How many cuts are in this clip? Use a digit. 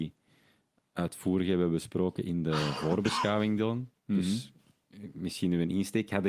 1